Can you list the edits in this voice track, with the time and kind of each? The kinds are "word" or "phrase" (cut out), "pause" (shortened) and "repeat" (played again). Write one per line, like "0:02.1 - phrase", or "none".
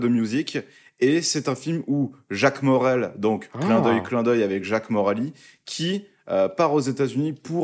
none